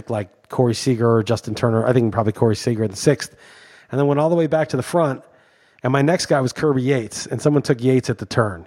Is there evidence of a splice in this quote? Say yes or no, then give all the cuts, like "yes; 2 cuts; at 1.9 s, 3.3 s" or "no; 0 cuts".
no; 0 cuts